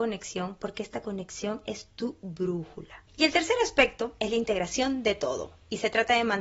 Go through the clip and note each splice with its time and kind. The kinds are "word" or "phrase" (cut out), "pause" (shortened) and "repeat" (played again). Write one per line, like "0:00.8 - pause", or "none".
0:03.1 - pause